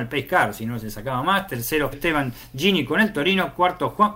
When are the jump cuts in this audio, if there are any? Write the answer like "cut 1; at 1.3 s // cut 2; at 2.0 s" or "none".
cut 1; at 1.9 s